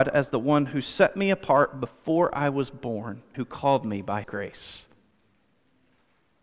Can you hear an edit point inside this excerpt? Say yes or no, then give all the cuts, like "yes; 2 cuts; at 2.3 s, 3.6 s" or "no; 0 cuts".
yes; 2 cuts; at 3.3 s, 4.2 s